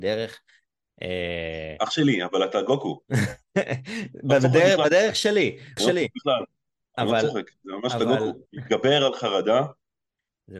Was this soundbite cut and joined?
yes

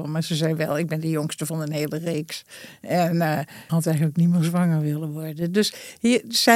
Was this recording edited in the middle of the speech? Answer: yes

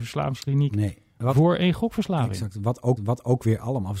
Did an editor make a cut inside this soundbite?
yes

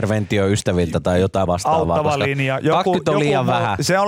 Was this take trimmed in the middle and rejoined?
yes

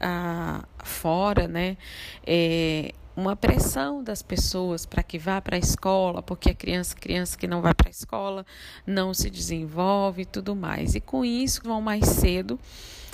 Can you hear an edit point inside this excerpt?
yes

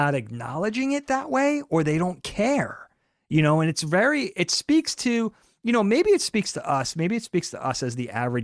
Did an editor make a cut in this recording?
no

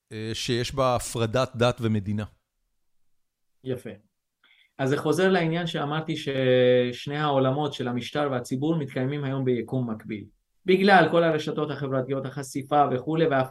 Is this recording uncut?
yes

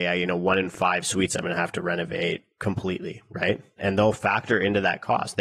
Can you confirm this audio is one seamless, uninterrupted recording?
yes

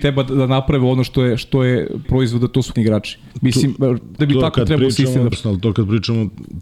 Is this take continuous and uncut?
no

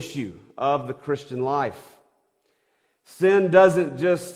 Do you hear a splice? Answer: no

